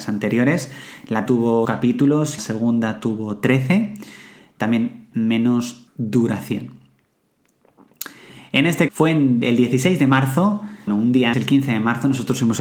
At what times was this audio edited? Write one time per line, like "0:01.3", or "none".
0:01.3
0:01.6
0:02.4
0:05.1
0:05.9
0:08.9
0:10.9
0:11.3